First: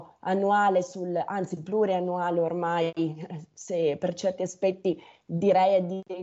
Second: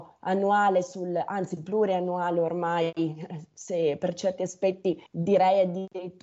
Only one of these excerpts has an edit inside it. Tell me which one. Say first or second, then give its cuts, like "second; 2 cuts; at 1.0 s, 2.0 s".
second; 1 cut; at 5.1 s